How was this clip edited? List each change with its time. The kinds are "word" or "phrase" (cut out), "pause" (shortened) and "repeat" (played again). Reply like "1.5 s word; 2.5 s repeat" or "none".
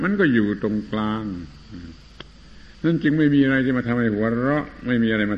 2.7 s pause